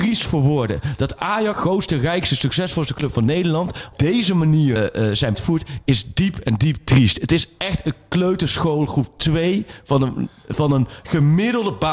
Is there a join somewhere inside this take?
yes; 4 cuts; at 1.5 s, 3.9 s, 4.8 s, 5.3 s

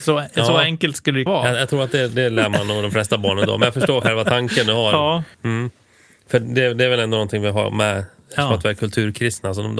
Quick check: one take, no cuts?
no; 2 cuts; at 1.3 s, 5.3 s

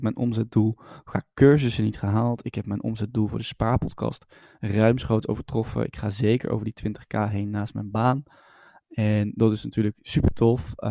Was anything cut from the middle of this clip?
no; 0 cuts

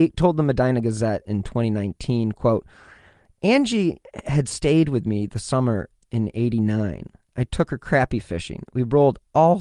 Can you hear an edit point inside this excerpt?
no; 0 cuts

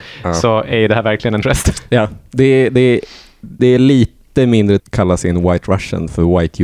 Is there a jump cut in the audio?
yes; 3 cuts; at 1.4 s, 3.6 s, 4.8 s

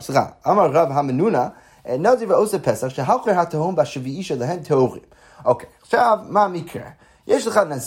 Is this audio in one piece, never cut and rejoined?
no; 1 cut; at 3.2 s

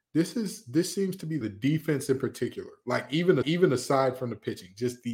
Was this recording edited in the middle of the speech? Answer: yes; 2 cuts; at 1.4 s, 3.4 s

